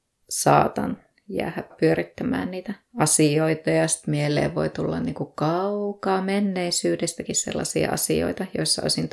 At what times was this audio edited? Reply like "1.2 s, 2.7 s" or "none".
1.7 s, 2.9 s